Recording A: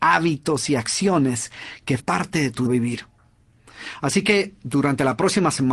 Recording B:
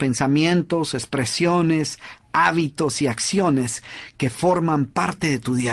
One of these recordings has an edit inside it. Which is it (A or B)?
A